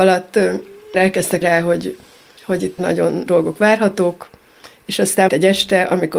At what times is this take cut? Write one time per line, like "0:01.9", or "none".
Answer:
0:00.9
0:01.4
0:02.8
0:03.3
0:05.3